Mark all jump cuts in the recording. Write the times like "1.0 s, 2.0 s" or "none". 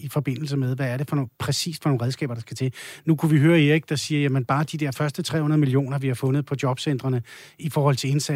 none